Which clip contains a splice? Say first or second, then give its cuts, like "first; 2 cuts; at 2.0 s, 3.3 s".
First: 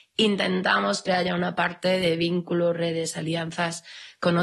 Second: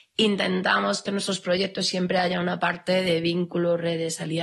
first; 1 cut; at 1.1 s